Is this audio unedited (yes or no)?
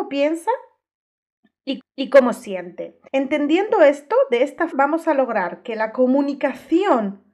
no